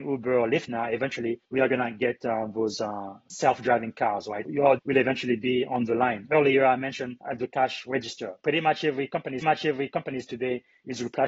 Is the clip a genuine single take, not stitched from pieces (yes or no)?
no